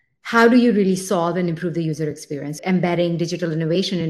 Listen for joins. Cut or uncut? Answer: cut